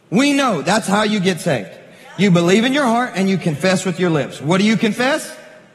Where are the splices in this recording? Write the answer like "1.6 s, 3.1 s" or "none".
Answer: none